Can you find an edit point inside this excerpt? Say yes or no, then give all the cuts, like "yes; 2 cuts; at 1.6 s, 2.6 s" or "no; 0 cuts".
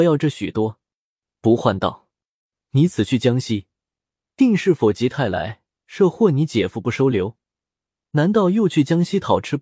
no; 0 cuts